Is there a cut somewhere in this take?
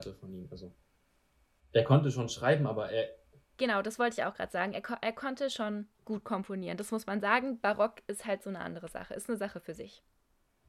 yes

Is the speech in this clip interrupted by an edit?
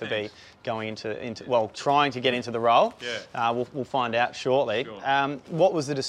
no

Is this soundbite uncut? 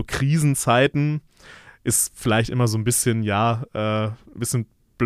yes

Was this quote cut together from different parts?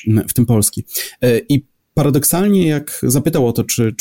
yes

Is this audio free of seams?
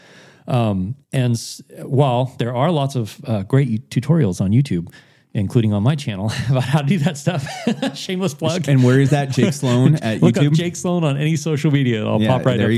no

